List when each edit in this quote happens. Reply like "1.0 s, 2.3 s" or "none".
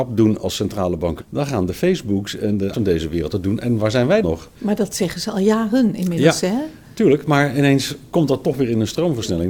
1.2 s, 2.7 s, 4.2 s